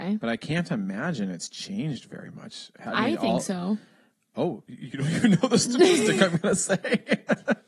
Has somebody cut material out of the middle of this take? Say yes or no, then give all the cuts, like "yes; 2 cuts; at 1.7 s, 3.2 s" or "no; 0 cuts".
no; 0 cuts